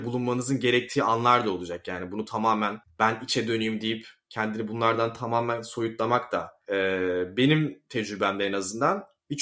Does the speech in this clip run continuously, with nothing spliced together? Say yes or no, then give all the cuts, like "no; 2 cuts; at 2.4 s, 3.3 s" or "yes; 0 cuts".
yes; 0 cuts